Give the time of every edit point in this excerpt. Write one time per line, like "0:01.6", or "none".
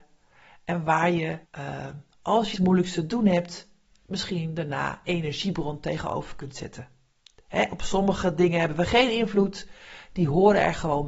0:01.4
0:02.5
0:05.0

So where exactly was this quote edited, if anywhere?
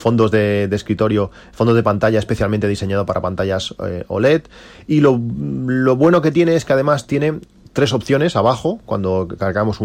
none

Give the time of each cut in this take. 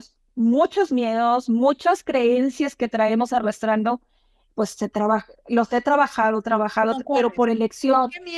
none

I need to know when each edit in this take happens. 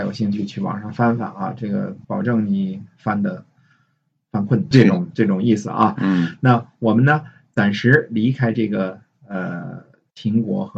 0:02.0
0:04.7

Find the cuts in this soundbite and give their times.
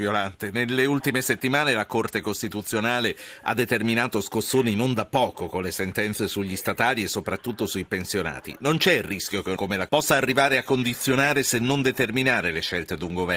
0:09.6
0:09.9

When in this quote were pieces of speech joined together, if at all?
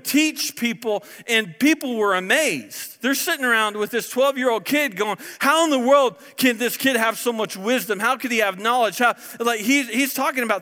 none

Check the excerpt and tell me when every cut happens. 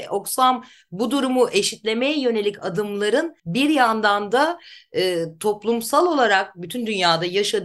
0:03.4

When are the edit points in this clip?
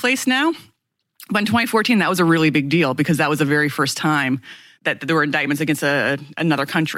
none

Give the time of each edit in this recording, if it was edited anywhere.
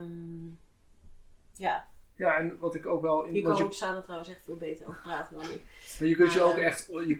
none

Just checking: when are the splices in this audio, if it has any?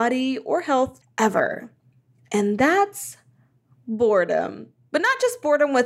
0:01.0

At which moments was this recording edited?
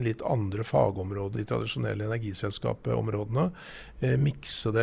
0:01.3

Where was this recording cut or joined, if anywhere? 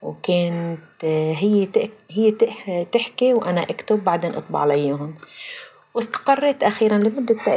none

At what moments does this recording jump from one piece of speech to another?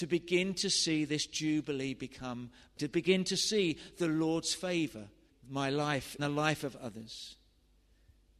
0:02.8
0:05.3
0:06.2

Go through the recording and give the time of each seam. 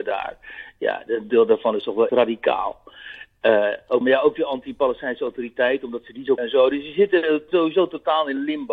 0:01.3
0:02.1
0:04.0
0:06.4
0:07.5

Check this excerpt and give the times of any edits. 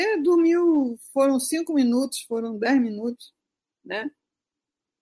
none

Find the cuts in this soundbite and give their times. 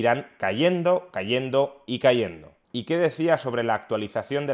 0:02.6

